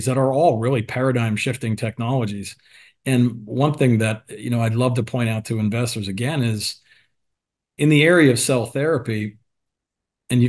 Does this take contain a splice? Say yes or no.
no